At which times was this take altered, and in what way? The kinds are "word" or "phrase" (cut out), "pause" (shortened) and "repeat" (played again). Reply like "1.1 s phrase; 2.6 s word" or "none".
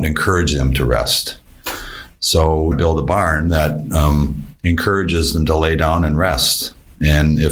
2.7 s word